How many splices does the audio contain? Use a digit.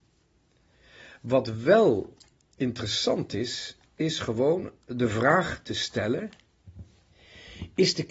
0